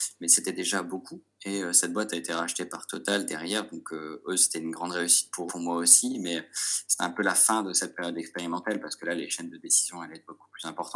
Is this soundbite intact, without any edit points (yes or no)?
no